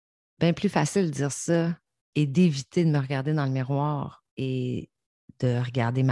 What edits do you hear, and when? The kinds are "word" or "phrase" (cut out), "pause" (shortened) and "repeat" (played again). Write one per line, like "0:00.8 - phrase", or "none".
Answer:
0:04.3 - pause